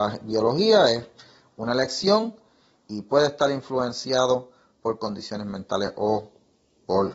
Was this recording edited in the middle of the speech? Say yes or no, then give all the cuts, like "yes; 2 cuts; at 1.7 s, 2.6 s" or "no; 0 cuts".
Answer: no; 0 cuts